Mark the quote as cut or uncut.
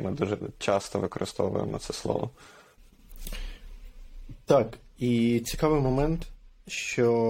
uncut